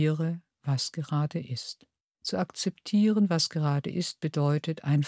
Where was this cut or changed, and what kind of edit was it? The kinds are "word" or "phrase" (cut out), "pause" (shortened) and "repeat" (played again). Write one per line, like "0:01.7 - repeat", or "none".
0:02.0 - pause